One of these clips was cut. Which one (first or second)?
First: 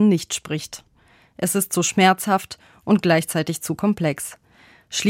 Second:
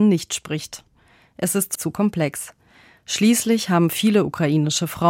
second